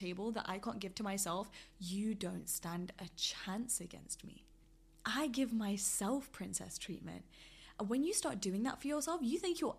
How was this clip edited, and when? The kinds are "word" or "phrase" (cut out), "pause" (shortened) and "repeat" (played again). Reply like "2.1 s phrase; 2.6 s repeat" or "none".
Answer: none